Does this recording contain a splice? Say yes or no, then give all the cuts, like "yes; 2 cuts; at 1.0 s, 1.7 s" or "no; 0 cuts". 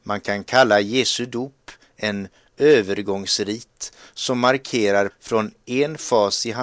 yes; 1 cut; at 5.1 s